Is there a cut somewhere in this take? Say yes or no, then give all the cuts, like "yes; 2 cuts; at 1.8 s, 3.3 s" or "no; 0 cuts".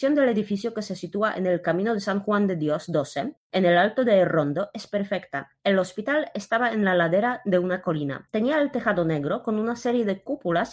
yes; 2 cuts; at 3.4 s, 5.6 s